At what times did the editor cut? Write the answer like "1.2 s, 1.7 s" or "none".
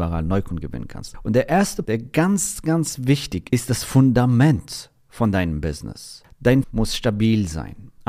1.9 s, 3.5 s, 6.6 s